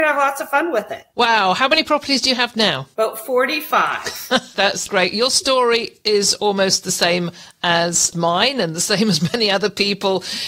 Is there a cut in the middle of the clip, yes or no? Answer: yes